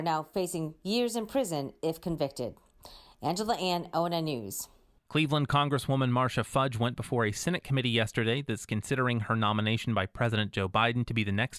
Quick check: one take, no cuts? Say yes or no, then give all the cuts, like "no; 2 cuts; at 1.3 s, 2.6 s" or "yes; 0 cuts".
yes; 0 cuts